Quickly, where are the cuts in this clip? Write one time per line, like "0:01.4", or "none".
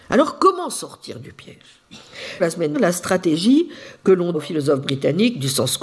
0:02.4
0:02.7
0:04.3

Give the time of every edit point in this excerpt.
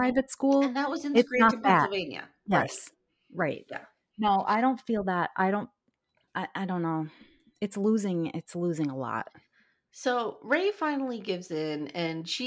none

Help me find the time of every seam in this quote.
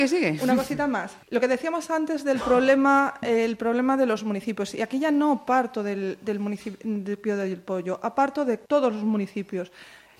0:01.2
0:08.6

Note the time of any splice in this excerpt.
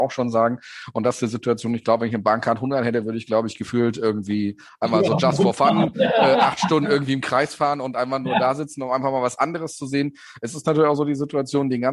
none

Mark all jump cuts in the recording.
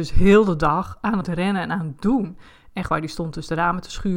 0:01.2

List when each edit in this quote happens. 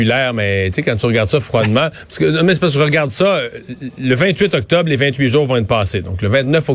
none

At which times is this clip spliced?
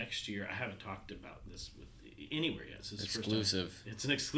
none

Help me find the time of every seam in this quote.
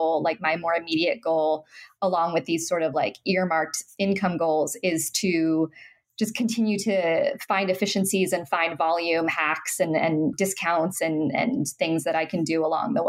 none

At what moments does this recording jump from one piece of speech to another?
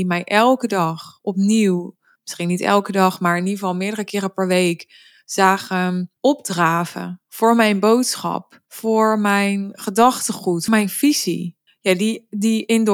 0:02.2
0:06.2
0:08.6
0:10.7
0:11.7

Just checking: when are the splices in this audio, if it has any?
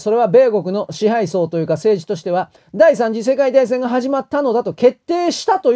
0:02.6

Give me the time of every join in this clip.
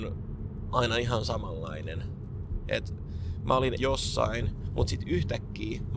0:03.8

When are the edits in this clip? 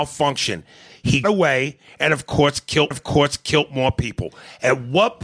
0:01.2
0:02.9

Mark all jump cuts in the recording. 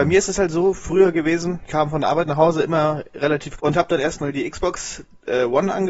0:01.7
0:03.6

